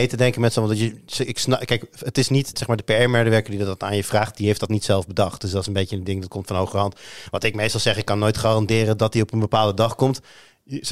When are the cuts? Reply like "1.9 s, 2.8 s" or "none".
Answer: 2.5 s